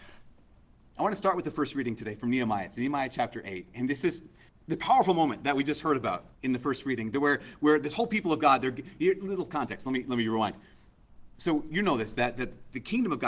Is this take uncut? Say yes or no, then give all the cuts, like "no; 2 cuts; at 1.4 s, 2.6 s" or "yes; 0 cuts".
no; 2 cuts; at 4.5 s, 6.3 s